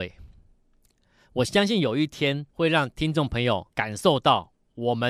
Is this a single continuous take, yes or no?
no